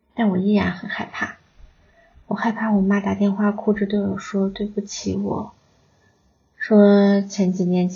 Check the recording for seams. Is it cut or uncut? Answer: uncut